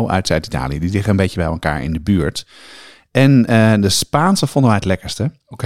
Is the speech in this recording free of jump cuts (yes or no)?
yes